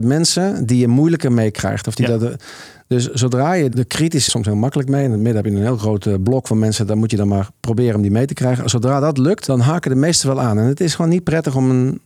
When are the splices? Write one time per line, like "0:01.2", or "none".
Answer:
0:03.7
0:04.3